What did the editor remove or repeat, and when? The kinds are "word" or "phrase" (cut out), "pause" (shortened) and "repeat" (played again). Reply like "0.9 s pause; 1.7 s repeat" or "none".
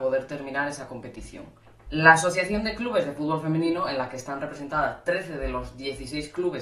none

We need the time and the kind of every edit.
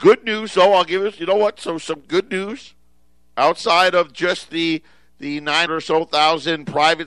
5.7 s word

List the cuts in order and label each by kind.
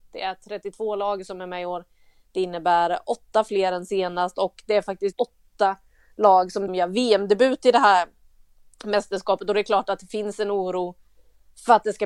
5.1 s word; 6.7 s word

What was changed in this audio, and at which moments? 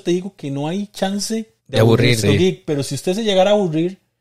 1.6 s pause; 2.2 s word

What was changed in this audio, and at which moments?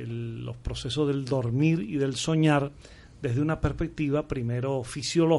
none

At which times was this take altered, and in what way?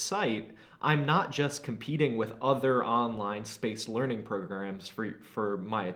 none

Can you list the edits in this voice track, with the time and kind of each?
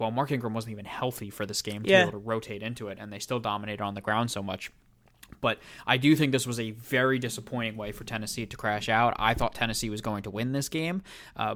none

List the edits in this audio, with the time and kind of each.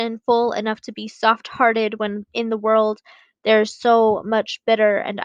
none

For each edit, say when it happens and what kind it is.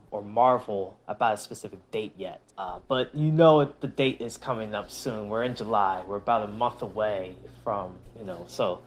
2.5 s pause

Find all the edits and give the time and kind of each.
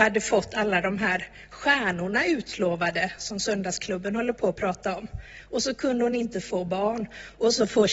none

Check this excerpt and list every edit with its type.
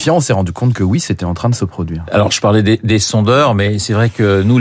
none

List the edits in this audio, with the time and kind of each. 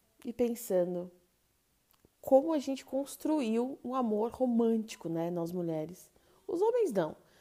none

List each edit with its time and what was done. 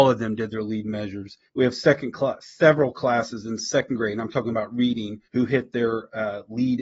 1.5 s pause; 5.2 s pause

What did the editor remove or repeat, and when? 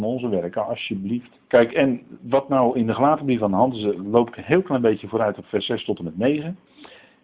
1.4 s pause

